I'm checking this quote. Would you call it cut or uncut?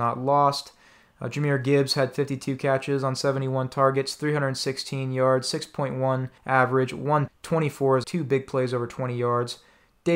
cut